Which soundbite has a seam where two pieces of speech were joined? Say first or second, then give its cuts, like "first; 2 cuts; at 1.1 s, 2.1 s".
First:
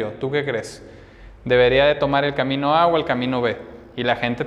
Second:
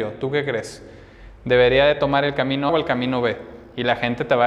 second; 1 cut; at 2.7 s